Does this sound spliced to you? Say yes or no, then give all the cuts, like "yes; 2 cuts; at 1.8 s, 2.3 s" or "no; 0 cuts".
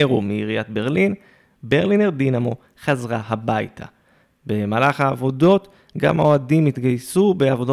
no; 0 cuts